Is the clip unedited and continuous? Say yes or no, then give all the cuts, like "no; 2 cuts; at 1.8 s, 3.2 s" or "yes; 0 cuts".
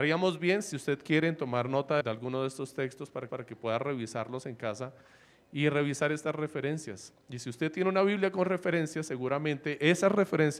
no; 2 cuts; at 2.0 s, 3.3 s